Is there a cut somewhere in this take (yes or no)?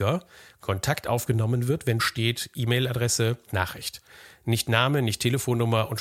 yes